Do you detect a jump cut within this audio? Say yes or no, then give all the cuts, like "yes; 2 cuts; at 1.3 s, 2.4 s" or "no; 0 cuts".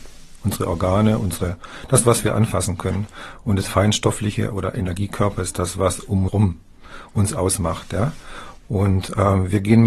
yes; 1 cut; at 6.3 s